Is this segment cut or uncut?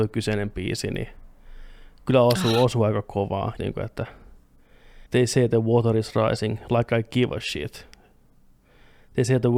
cut